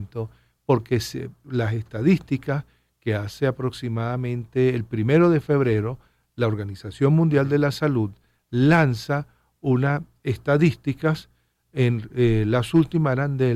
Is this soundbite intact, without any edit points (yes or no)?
yes